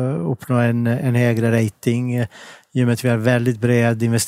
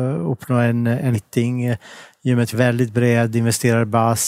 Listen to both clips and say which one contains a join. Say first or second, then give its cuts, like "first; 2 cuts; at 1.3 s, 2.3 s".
second; 2 cuts; at 1.1 s, 2.5 s